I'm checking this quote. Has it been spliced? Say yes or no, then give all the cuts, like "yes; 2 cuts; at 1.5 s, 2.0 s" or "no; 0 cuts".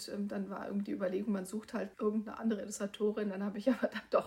yes; 1 cut; at 1.9 s